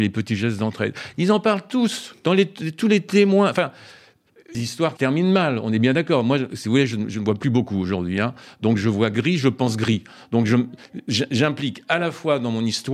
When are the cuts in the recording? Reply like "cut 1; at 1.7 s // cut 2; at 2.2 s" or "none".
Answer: cut 1; at 2.2 s // cut 2; at 4.5 s // cut 3; at 5.0 s